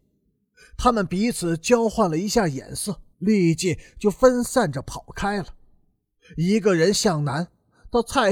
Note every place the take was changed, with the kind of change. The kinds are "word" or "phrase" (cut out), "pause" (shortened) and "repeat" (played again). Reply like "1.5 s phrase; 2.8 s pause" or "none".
3.1 s pause